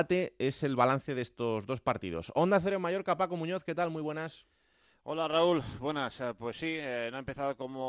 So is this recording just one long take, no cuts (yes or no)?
yes